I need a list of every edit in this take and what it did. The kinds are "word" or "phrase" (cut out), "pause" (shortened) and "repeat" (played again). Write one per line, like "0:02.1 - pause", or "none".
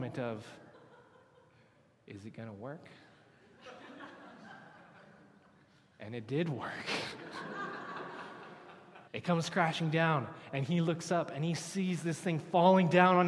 0:09.1 - pause